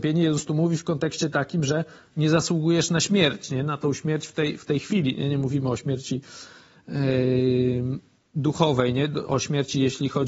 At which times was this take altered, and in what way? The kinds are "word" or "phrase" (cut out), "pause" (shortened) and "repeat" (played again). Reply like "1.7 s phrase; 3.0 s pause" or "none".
none

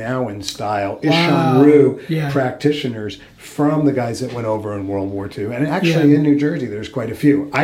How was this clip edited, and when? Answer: none

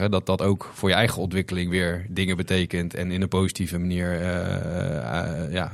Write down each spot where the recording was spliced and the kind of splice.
none

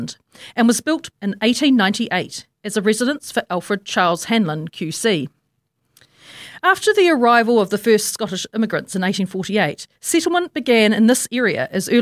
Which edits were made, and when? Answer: 1.1 s phrase; 9.9 s pause

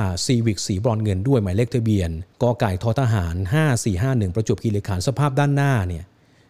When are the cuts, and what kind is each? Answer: 2.3 s pause

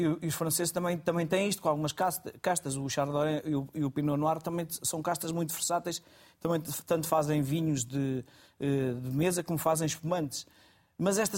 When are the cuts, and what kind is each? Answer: none

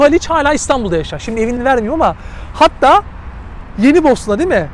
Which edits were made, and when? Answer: 1.6 s word

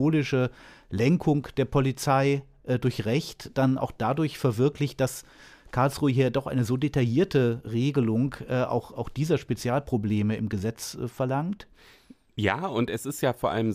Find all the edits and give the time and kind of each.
none

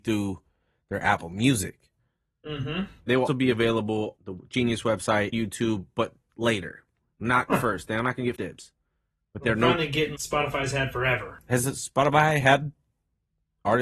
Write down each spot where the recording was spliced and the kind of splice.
3.3 s word; 4.2 s word; 5.3 s word; 7.5 s word; 8.4 s word; 10.2 s word

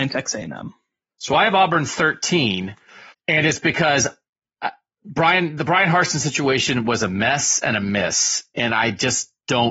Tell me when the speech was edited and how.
0.9 s pause; 3.1 s pause

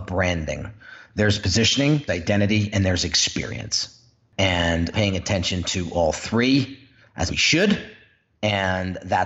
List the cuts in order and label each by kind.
2.1 s word; 4.9 s phrase; 7.3 s phrase

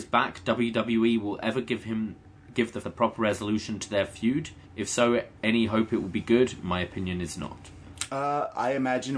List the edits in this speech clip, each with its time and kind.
2.8 s word; 4.6 s pause; 5.4 s pause

